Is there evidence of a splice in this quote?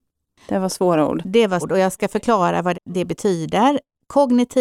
yes; 2 cuts; at 1.6 s, 2.7 s

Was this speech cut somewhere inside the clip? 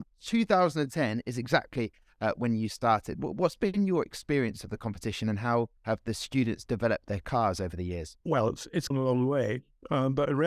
yes; 3 cuts; at 5.8 s, 8.2 s, 8.9 s

